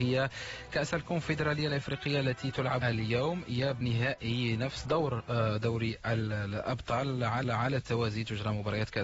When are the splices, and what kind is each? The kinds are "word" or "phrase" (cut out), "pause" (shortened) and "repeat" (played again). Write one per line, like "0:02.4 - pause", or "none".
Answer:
0:02.8 - word
0:03.8 - word
0:04.8 - phrase
0:07.4 - repeat